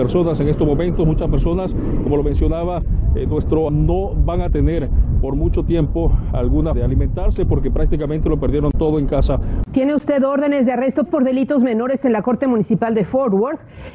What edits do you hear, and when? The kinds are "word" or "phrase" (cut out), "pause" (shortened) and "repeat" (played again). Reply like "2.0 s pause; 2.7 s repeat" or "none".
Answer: 3.7 s word; 6.7 s word; 11.1 s word